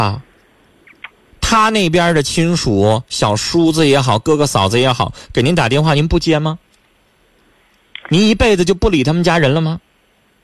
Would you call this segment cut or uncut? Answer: uncut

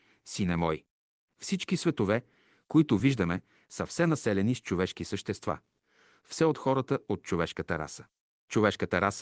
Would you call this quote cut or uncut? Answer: uncut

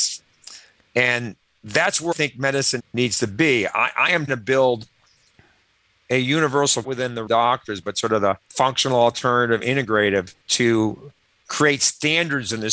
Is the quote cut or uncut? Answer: cut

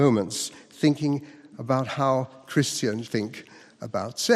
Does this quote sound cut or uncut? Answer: cut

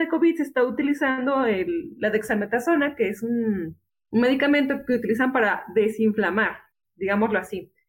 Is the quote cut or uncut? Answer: uncut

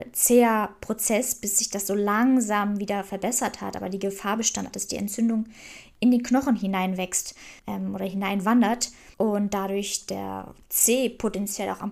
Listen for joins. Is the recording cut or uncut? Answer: cut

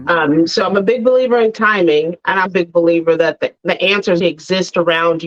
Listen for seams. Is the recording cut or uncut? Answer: cut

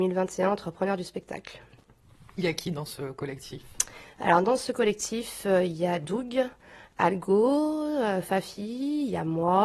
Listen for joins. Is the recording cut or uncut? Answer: uncut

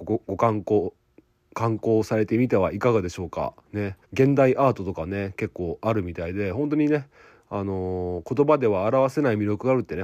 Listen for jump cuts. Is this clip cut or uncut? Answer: cut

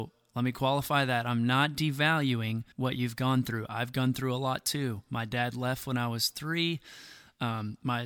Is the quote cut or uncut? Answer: cut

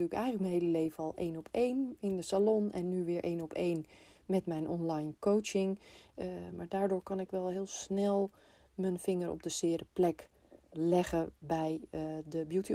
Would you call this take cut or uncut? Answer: uncut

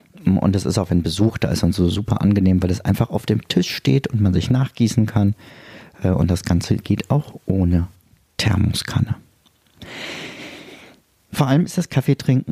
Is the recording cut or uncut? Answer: uncut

